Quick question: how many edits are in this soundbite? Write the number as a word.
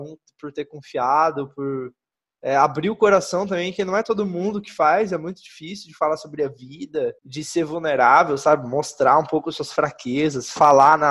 one